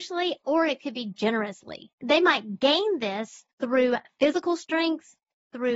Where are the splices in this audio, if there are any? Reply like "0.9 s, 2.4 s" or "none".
1.9 s, 3.5 s